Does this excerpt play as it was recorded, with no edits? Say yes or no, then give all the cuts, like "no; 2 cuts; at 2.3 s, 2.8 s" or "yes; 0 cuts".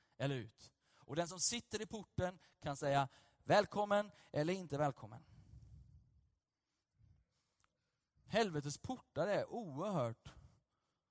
yes; 0 cuts